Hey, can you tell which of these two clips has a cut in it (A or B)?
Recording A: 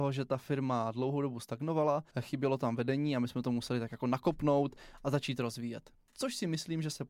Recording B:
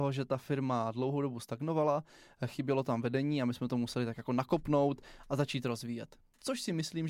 A